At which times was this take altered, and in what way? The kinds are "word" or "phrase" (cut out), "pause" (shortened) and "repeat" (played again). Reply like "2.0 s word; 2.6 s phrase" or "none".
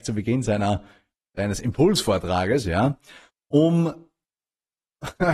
none